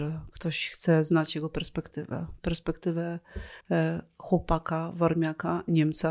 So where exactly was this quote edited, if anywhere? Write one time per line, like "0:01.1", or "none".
0:03.6